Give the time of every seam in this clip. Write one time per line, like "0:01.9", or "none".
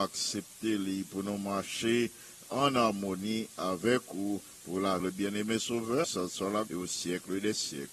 0:02.4
0:05.0
0:06.0
0:06.7